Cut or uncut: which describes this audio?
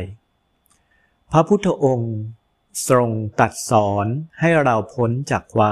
cut